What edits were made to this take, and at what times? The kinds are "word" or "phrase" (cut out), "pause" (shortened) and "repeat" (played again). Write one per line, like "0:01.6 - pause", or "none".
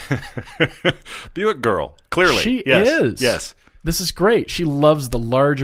none